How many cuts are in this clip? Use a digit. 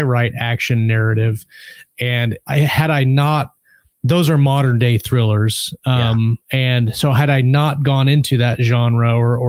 1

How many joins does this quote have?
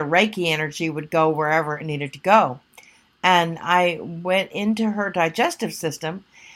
0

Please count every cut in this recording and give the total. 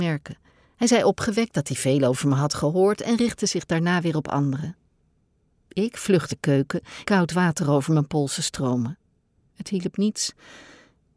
2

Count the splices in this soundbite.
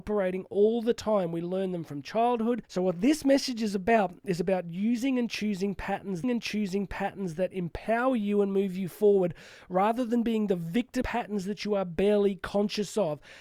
3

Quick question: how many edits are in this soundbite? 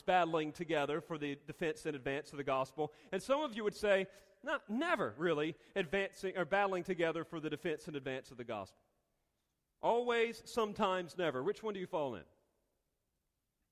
0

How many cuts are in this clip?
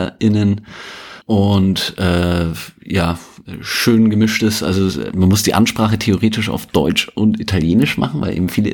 1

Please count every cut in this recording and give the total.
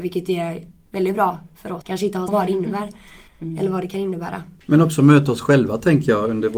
4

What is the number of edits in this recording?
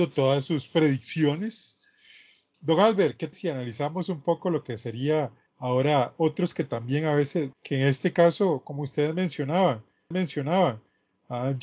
5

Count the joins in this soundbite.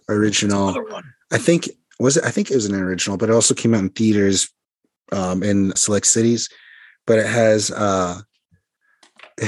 1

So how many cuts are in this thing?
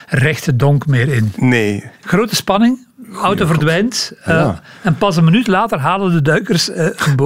1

